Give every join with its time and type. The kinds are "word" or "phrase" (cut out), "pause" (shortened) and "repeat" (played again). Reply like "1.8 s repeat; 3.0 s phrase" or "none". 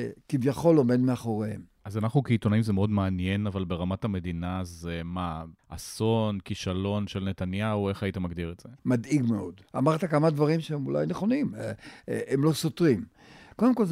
1.8 s pause; 8.8 s pause; 9.7 s pause